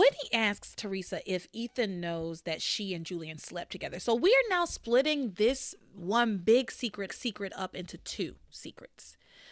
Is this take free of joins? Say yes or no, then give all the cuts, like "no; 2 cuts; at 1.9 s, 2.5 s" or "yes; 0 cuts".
no; 1 cut; at 7.1 s